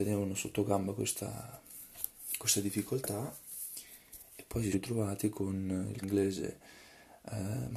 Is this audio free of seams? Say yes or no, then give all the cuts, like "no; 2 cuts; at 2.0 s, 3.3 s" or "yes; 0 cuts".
no; 2 cuts; at 4.7 s, 6.0 s